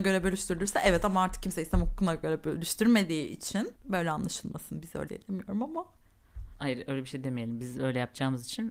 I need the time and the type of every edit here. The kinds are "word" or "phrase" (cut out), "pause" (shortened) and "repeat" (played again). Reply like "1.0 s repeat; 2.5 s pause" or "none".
3.8 s pause; 5.1 s word; 6.5 s pause